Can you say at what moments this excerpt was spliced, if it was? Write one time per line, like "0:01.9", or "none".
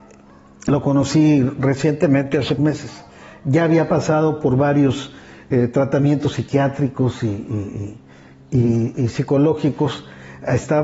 0:02.6